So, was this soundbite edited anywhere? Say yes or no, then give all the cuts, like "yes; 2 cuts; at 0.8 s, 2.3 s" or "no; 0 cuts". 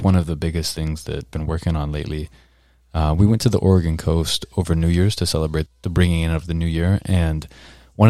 yes; 2 cuts; at 1.3 s, 5.7 s